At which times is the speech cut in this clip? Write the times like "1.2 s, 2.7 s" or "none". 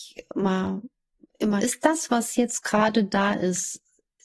1.6 s